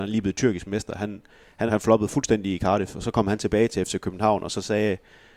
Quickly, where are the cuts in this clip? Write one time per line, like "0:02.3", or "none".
0:01.7